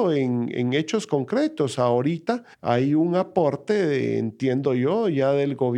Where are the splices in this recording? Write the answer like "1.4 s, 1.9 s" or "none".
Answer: 2.5 s